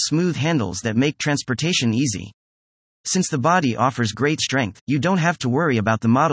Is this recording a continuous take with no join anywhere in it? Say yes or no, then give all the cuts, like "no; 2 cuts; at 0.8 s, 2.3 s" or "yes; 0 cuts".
yes; 0 cuts